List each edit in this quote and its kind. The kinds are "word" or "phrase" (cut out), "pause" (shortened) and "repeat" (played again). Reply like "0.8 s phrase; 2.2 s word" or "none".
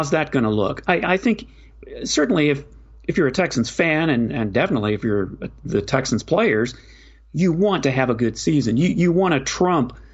none